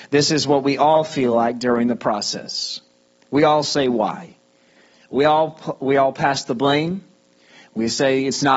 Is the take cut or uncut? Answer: uncut